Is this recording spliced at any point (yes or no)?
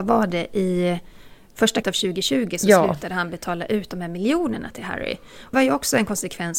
yes